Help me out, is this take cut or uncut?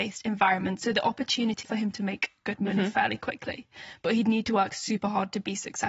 cut